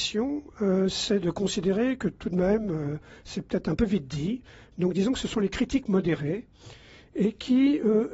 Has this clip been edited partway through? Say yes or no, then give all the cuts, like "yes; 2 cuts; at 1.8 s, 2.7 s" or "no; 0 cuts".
no; 0 cuts